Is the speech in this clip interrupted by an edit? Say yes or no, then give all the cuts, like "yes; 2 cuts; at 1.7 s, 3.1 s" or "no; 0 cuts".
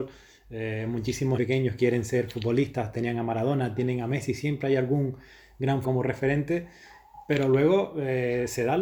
yes; 2 cuts; at 1.4 s, 5.8 s